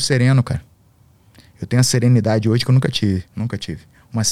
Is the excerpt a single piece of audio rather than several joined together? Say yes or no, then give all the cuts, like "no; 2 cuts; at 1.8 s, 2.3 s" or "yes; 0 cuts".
no; 1 cut; at 3.3 s